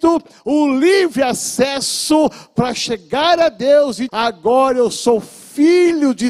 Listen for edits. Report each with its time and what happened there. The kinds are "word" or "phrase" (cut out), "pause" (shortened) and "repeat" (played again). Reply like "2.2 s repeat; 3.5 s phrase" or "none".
4.1 s word